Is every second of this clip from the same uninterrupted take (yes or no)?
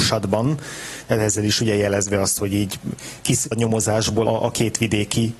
no